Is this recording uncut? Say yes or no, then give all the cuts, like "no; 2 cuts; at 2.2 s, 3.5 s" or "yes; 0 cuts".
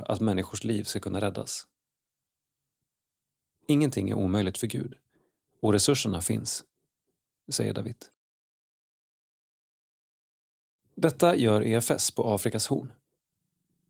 yes; 0 cuts